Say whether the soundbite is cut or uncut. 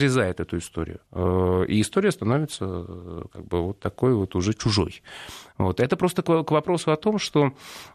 cut